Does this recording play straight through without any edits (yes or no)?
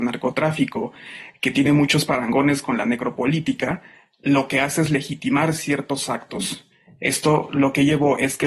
yes